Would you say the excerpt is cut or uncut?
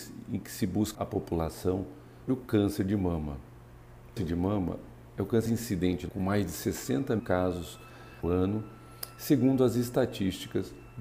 cut